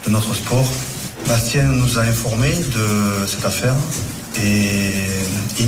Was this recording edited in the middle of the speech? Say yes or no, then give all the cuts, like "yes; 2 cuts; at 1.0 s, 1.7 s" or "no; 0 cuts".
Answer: no; 0 cuts